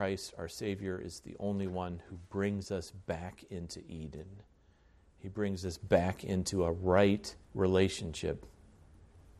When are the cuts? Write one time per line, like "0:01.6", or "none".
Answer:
0:07.4